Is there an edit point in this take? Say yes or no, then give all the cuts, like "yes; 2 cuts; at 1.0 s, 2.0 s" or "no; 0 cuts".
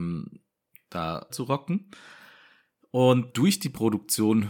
yes; 2 cuts; at 1.3 s, 3.3 s